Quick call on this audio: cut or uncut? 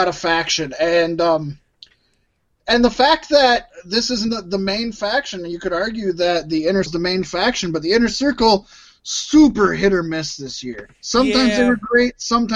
cut